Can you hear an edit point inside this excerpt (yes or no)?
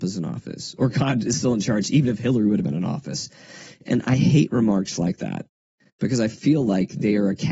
no